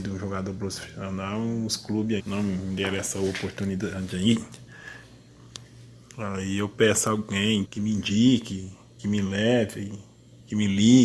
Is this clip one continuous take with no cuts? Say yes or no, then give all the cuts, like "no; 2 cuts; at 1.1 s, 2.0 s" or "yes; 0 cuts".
no; 2 cuts; at 2.2 s, 7.6 s